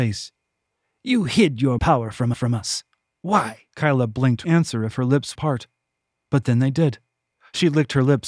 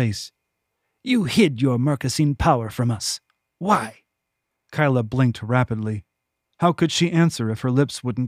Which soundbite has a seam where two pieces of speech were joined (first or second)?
first